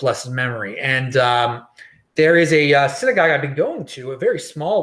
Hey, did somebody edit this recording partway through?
no; 0 cuts

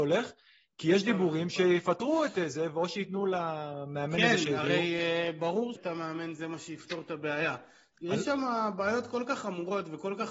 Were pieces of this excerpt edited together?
yes; 1 cut; at 5.8 s

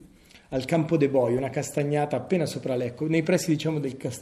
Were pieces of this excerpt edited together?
no; 0 cuts

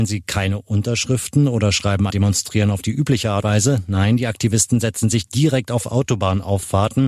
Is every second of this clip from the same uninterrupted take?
no; 2 cuts; at 2.1 s, 3.4 s

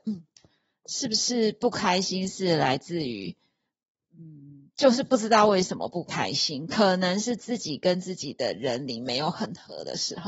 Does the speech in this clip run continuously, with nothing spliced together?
yes; 0 cuts

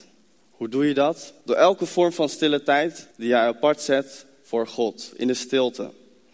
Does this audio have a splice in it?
yes; 2 cuts; at 1.4 s, 3.1 s

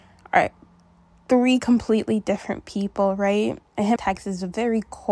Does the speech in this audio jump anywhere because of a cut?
yes; 1 cut; at 4.0 s

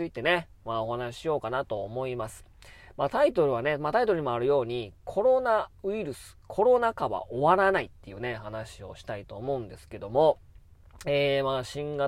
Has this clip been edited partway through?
no; 0 cuts

